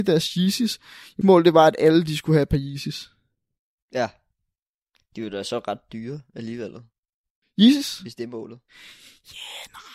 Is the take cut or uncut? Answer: cut